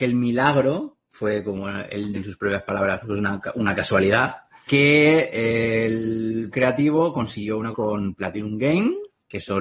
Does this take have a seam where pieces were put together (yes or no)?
yes